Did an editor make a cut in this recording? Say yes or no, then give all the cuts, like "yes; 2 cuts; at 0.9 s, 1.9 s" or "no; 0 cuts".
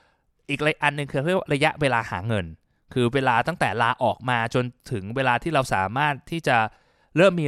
no; 0 cuts